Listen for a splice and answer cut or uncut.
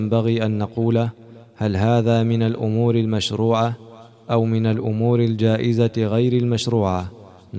uncut